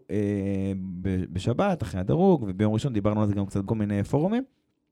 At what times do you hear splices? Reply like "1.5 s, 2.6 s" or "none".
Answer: 1.0 s, 3.7 s